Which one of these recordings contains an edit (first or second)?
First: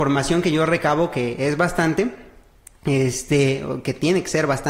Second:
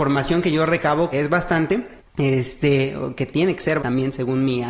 second